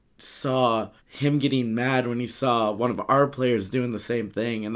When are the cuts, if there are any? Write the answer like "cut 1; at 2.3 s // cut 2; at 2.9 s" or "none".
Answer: cut 1; at 1.0 s